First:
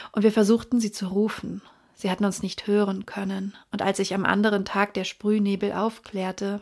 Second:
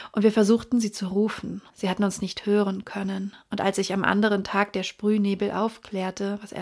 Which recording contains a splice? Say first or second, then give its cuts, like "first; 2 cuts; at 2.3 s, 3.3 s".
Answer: second; 1 cut; at 1.7 s